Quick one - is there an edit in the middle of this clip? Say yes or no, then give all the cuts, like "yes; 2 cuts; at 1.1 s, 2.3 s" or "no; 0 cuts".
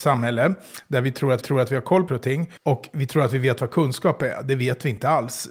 yes; 3 cuts; at 1.4 s, 2.1 s, 2.6 s